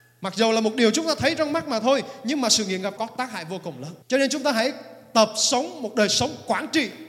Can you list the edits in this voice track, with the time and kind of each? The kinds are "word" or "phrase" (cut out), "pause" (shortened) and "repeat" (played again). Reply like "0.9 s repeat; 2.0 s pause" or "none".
3.0 s word; 4.0 s pause